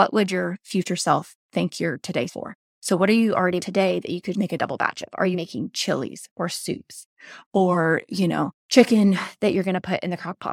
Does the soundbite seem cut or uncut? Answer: cut